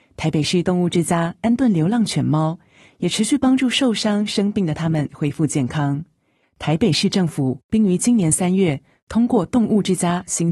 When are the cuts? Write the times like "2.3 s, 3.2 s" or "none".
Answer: none